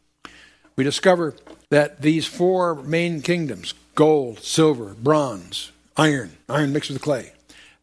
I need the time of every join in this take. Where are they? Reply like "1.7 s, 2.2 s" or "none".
1.6 s, 6.4 s